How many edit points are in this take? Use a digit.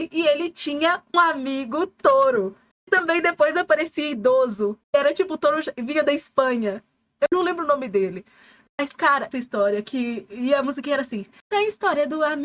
3